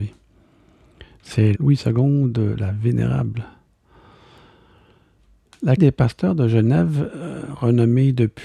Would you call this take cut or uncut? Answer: cut